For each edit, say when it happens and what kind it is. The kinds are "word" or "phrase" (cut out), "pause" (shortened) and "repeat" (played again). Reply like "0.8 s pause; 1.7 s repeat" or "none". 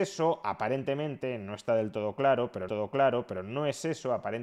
2.7 s repeat